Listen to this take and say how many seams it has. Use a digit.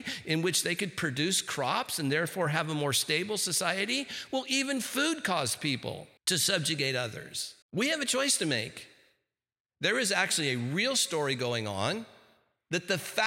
2